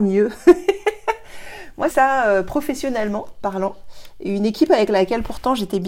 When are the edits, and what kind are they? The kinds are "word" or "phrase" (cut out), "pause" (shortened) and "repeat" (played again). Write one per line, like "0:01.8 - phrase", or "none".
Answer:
0:01.9 - phrase

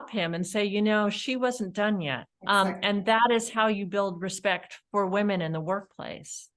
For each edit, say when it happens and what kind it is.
0:02.3 - pause
0:04.9 - pause

